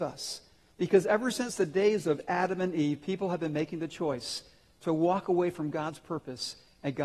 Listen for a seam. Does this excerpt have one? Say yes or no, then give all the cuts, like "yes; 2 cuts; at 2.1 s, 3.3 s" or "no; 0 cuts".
no; 0 cuts